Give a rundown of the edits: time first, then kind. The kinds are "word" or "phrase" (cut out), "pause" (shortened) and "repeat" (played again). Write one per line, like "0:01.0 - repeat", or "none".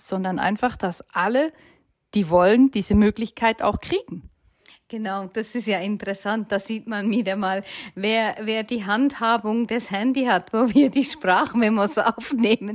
none